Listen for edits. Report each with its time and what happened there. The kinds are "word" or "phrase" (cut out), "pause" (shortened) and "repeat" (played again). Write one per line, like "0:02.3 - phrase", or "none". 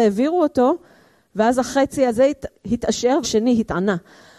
0:03.2 - word